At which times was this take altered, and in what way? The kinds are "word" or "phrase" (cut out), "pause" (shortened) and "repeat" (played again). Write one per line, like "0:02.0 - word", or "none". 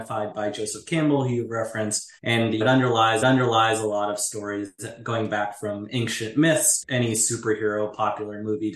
0:02.2 - pause
0:02.6 - word
0:03.2 - repeat
0:06.8 - word